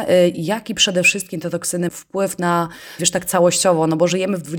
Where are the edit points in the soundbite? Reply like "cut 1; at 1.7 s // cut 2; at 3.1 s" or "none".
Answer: cut 1; at 1.9 s // cut 2; at 3.0 s

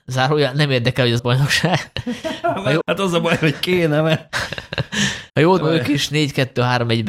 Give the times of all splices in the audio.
cut 1; at 1.2 s // cut 2; at 2.8 s // cut 3; at 5.3 s // cut 4; at 5.6 s

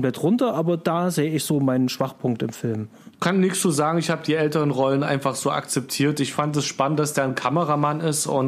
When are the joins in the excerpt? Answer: cut 1; at 3.1 s

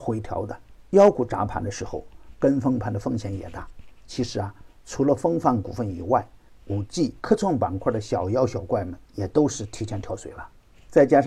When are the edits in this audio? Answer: cut 1; at 6.6 s // cut 2; at 7.2 s // cut 3; at 9.0 s

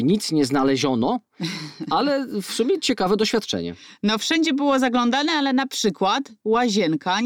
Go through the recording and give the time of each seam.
none

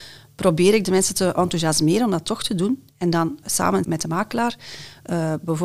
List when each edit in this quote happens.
cut 1; at 3.4 s // cut 2; at 3.8 s

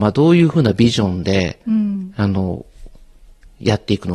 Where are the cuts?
none

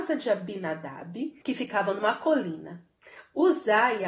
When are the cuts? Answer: cut 1; at 1.4 s

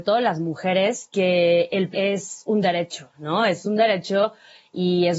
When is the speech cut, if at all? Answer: cut 1; at 1.9 s

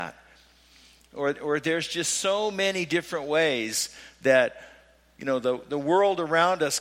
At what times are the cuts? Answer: none

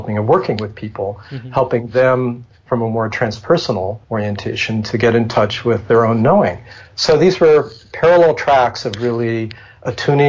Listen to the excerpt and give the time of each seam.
cut 1; at 4.0 s

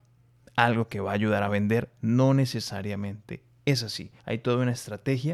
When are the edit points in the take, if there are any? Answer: cut 1; at 4.2 s

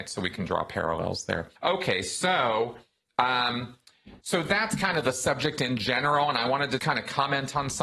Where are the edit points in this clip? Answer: cut 1; at 1.6 s // cut 2; at 4.2 s // cut 3; at 6.8 s

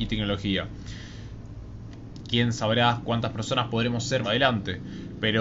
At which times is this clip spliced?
cut 1; at 4.2 s

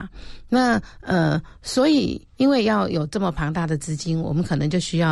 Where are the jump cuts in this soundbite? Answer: none

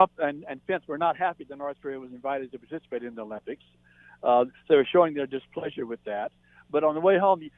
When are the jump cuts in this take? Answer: none

